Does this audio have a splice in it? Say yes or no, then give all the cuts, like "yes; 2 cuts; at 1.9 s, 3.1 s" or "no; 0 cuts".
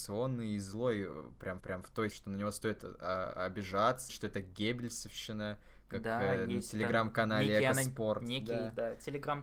yes; 3 cuts; at 1.6 s, 2.1 s, 4.1 s